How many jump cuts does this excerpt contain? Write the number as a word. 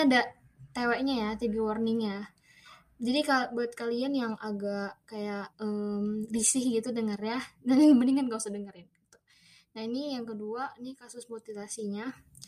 one